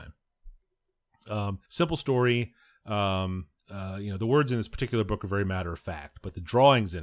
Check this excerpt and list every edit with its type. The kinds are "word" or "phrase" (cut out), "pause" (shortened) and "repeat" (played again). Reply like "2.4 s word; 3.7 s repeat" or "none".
1.6 s pause; 3.6 s pause